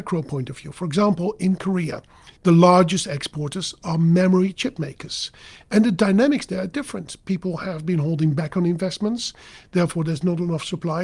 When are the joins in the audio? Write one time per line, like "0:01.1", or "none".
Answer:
0:02.4